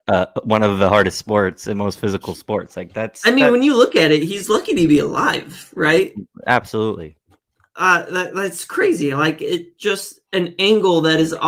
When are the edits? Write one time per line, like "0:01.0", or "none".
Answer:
none